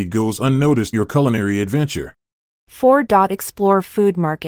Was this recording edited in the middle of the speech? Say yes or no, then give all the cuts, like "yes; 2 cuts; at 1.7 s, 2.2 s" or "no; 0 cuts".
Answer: yes; 1 cut; at 0.9 s